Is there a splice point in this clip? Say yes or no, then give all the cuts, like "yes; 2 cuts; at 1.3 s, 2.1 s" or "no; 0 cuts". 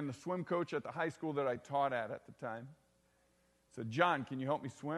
no; 0 cuts